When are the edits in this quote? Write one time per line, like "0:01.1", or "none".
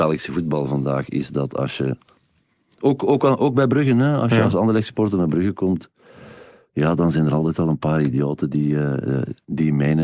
none